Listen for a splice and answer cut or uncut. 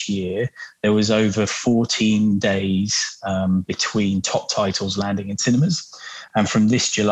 uncut